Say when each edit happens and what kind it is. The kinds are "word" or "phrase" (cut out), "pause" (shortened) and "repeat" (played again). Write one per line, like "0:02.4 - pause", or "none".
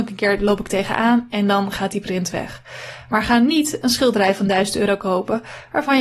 none